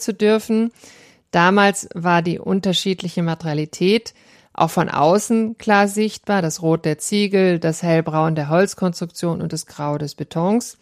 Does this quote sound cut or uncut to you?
uncut